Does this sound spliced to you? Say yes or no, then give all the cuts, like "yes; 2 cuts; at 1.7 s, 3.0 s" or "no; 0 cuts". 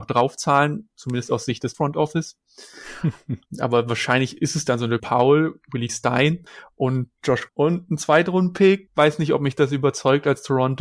yes; 5 cuts; at 1.7 s, 3.5 s, 5.0 s, 5.9 s, 7.5 s